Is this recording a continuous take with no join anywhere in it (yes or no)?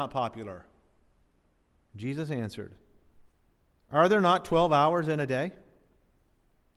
yes